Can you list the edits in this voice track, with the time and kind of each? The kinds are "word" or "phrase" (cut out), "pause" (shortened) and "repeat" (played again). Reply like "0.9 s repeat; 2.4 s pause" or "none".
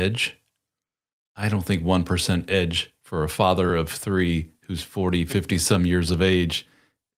none